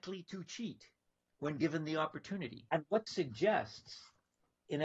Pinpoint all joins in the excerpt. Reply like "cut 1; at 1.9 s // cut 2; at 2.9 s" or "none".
cut 1; at 3.1 s